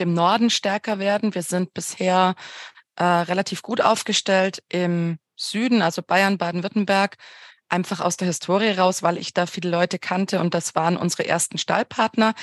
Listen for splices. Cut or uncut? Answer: uncut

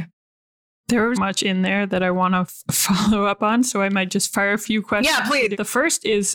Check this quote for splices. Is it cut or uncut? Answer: cut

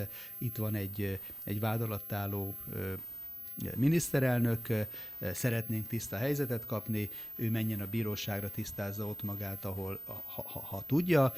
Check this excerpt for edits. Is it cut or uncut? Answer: uncut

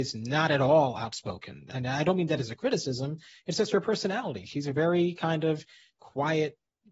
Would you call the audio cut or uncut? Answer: uncut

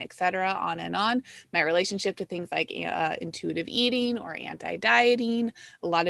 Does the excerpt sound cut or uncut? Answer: uncut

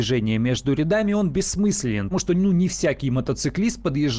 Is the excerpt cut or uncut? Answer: cut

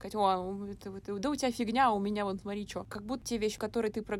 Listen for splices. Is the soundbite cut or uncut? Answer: uncut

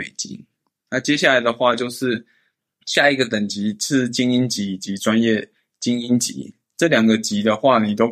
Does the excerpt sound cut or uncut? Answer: uncut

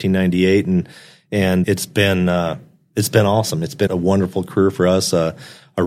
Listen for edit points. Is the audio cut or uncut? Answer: cut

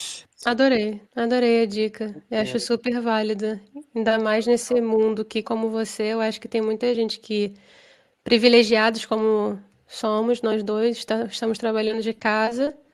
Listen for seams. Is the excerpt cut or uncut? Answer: cut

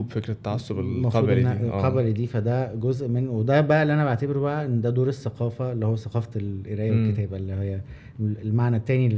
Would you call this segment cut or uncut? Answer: uncut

